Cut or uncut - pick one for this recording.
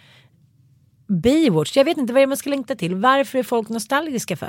cut